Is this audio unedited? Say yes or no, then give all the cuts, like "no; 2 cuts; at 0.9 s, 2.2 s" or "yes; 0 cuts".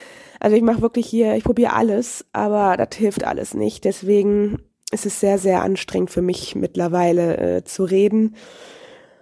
yes; 0 cuts